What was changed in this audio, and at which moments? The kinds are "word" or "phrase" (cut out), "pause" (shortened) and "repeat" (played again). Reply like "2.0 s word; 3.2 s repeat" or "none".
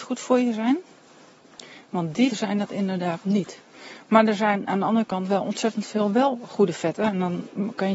2.3 s word